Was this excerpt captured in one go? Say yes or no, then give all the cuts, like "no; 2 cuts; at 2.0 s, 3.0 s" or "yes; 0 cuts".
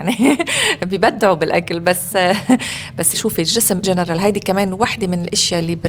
no; 2 cuts; at 3.1 s, 3.8 s